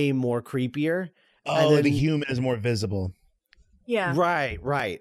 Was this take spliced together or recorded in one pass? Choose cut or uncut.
uncut